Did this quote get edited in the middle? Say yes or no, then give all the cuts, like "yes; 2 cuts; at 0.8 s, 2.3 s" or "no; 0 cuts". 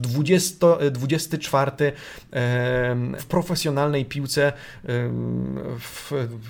yes; 1 cut; at 3.2 s